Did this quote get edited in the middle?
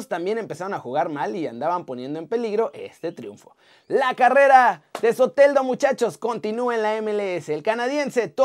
no; 0 cuts

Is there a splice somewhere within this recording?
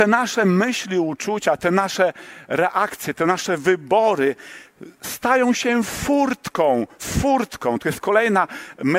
no; 0 cuts

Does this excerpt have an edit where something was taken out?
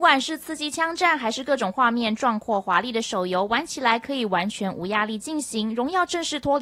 no; 0 cuts

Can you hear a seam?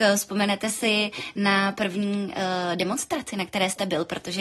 no; 0 cuts

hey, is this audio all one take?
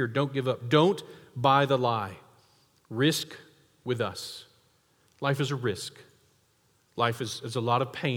yes; 0 cuts

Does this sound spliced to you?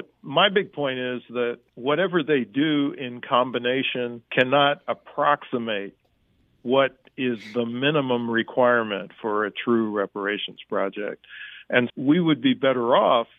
yes; 3 cuts; at 1.7 s, 4.2 s, 11.9 s

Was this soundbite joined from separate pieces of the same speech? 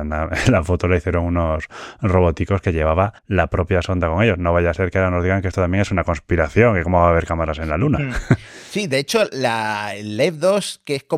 yes; 1 cut; at 3.2 s

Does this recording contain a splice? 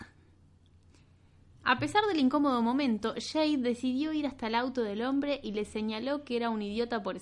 no; 0 cuts

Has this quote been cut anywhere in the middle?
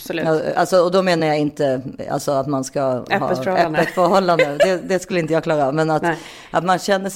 no; 0 cuts

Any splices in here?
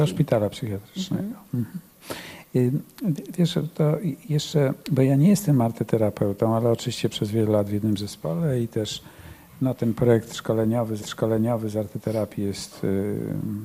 yes; 3 cuts; at 4.8 s, 7.1 s, 11.0 s

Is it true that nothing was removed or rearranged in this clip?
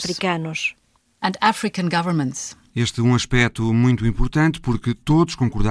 yes; 0 cuts

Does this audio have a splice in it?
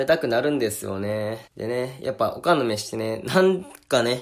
yes; 1 cut; at 1.5 s

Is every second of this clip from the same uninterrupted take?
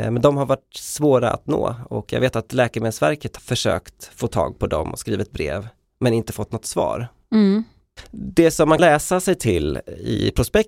no; 2 cuts; at 3.4 s, 8.8 s

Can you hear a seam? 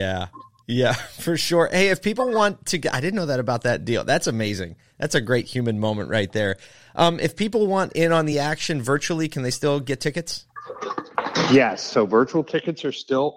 no; 0 cuts

